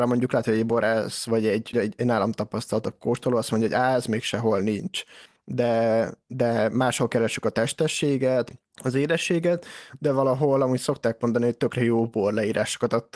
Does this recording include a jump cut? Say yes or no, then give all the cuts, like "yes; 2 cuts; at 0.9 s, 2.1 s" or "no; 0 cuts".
yes; 2 cuts; at 1.7 s, 8.7 s